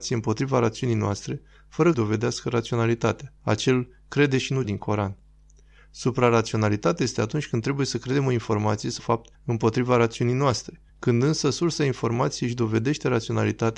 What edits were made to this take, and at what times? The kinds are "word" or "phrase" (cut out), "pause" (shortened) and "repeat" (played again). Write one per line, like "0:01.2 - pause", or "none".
0:01.9 - phrase
0:03.4 - pause
0:04.6 - word
0:09.0 - word
0:09.3 - pause
0:10.9 - pause